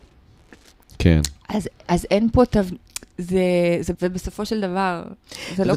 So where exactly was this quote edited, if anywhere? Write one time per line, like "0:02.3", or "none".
0:03.9